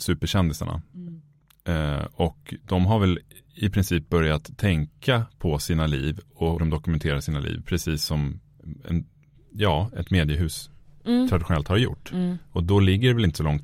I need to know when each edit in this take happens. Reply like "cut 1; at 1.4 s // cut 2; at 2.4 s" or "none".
cut 1; at 6.6 s